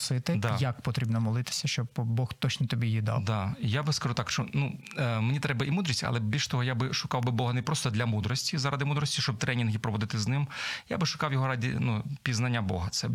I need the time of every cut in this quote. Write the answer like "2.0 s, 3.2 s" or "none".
none